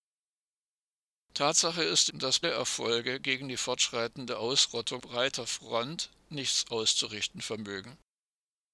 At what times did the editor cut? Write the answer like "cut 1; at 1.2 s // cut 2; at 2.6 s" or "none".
cut 1; at 2.1 s // cut 2; at 2.4 s // cut 3; at 5.0 s